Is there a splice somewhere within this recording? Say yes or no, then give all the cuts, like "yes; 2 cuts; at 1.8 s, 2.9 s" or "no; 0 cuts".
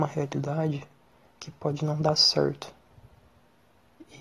no; 0 cuts